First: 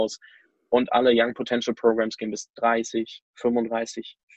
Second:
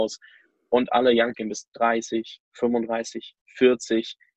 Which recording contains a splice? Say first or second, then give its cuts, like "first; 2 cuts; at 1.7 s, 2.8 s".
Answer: second; 1 cut; at 1.3 s